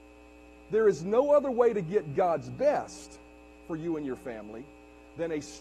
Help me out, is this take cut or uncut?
uncut